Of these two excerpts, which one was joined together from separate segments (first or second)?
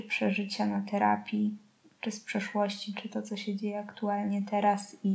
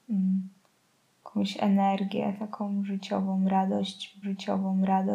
second